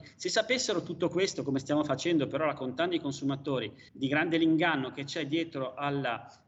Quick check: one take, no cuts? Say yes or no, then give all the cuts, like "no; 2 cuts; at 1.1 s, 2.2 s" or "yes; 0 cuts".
no; 1 cut; at 3.9 s